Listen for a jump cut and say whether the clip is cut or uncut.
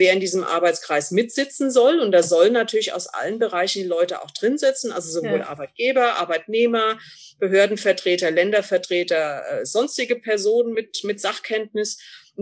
uncut